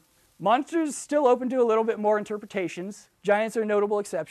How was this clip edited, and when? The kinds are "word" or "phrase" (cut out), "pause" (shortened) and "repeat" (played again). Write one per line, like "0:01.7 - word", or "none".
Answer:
0:03.1 - pause